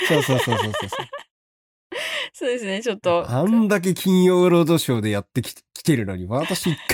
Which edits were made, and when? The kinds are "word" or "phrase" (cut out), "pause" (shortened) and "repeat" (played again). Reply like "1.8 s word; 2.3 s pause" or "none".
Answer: none